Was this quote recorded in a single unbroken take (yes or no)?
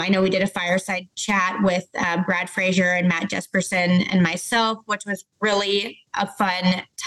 no